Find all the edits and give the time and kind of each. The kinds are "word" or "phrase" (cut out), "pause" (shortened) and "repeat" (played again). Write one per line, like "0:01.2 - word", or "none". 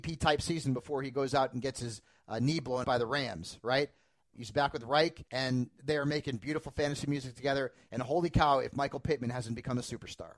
0:02.8 - word
0:04.3 - word
0:05.3 - pause